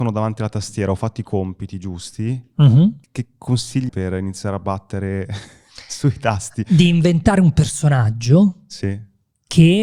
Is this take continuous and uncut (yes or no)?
no